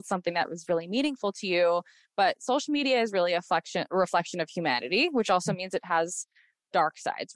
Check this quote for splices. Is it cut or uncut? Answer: uncut